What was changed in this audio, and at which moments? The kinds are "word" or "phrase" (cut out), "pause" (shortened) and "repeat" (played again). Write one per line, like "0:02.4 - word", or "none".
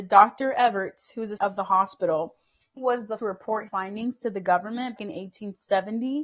0:01.4 - word
0:02.8 - word
0:03.2 - word
0:03.7 - word
0:05.0 - word